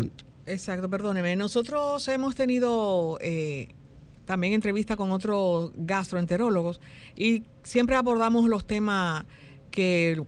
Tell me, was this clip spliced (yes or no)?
no